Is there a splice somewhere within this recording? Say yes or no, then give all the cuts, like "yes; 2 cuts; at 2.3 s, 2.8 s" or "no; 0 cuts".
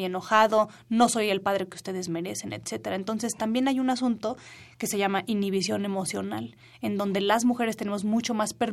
no; 0 cuts